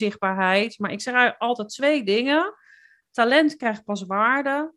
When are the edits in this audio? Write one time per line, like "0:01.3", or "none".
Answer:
none